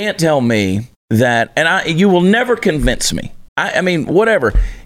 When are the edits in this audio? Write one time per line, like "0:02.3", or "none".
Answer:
0:01.0
0:03.5